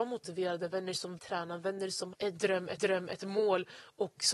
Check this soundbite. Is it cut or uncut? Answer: cut